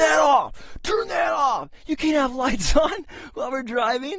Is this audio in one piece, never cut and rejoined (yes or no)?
yes